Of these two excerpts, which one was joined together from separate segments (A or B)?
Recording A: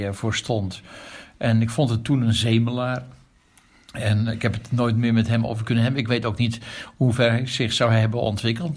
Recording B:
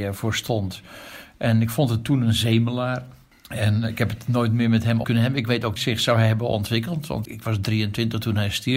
B